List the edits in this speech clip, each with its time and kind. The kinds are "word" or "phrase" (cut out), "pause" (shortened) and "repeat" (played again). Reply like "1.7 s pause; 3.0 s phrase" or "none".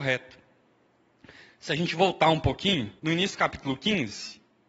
3.0 s pause